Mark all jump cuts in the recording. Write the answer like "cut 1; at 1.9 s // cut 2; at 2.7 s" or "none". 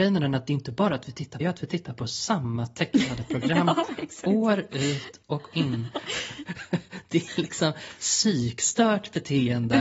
cut 1; at 1.4 s // cut 2; at 5.5 s